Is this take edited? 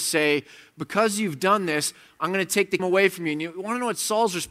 yes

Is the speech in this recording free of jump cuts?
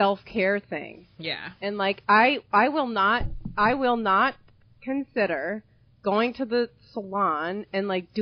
yes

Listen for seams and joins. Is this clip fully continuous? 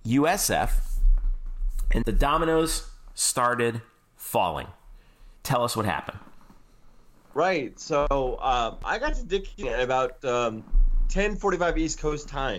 no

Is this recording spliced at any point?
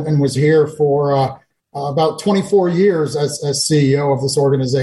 no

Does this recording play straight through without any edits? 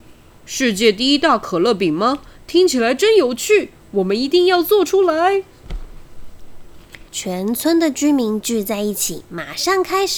no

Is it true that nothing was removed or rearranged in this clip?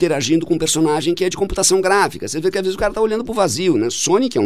yes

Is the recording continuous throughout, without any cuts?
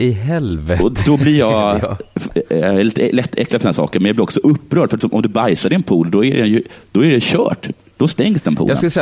yes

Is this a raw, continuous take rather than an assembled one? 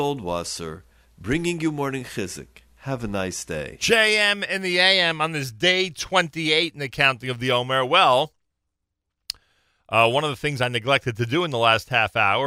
no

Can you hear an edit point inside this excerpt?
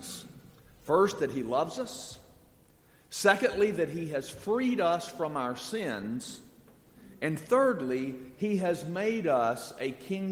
no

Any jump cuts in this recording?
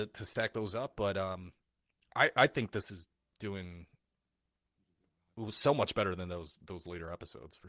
no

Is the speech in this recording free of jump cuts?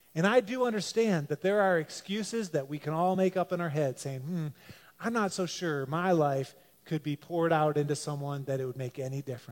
yes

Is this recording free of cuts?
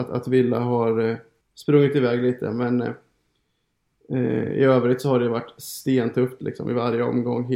no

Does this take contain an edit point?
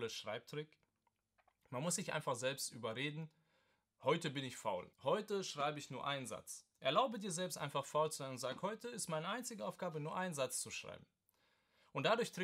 yes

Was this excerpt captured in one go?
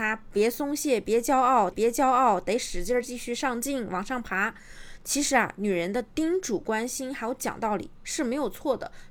no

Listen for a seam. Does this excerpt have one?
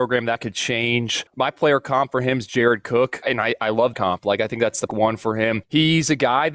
yes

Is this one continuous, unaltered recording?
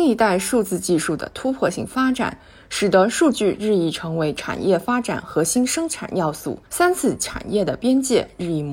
no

